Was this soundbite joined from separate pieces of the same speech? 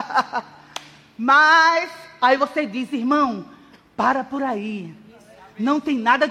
no; 0 cuts

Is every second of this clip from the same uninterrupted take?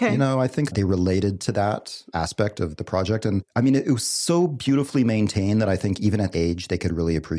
no; 1 cut; at 6.3 s

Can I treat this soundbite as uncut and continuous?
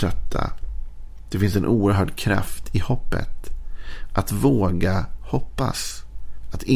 yes; 0 cuts

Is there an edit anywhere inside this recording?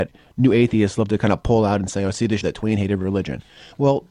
yes; 1 cut; at 2.4 s

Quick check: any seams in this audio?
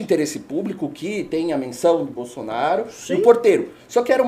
no; 0 cuts

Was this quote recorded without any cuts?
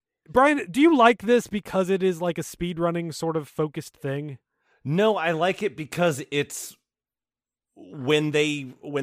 yes; 0 cuts

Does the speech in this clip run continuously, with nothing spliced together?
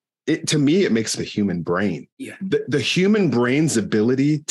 no; 2 cuts; at 1.2 s, 2.1 s

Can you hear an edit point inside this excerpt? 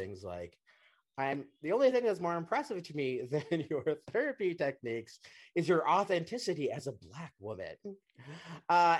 no; 0 cuts

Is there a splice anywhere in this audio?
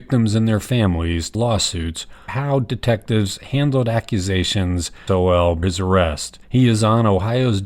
yes; 5 cuts; at 1.3 s, 2.3 s, 5.1 s, 5.6 s, 6.4 s

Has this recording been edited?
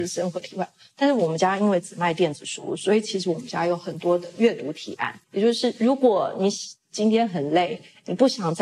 yes; 1 cut; at 5.2 s

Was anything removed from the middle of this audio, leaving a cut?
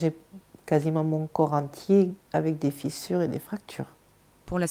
yes; 1 cut; at 2.2 s

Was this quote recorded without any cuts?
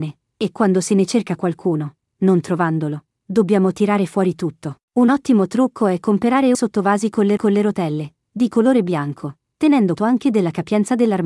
no; 4 cuts; at 4.8 s, 6.5 s, 7.4 s, 10.0 s

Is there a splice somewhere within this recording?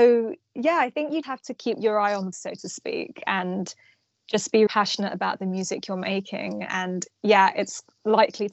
yes; 3 cuts; at 1.2 s, 2.3 s, 4.7 s

